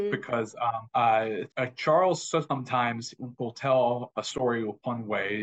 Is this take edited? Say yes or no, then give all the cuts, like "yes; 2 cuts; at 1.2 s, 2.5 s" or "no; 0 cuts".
no; 0 cuts